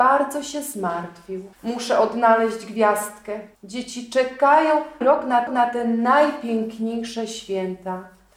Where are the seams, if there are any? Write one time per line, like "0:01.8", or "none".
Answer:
0:01.5
0:03.5
0:05.0
0:05.5